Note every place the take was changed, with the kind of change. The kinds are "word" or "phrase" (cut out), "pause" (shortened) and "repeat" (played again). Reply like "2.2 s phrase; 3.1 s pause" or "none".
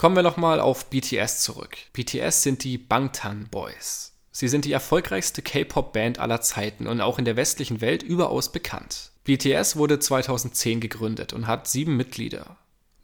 1.9 s pause; 9.2 s pause